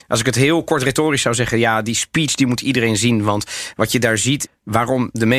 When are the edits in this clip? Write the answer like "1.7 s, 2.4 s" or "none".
4.5 s